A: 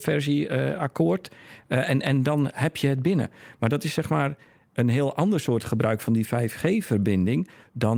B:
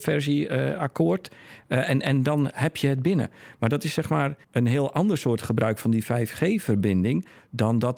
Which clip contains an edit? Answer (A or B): B